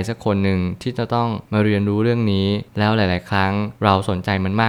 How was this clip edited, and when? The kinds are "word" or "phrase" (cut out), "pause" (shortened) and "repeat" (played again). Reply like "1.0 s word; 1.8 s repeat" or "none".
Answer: 1.5 s pause; 2.7 s pause; 3.8 s pause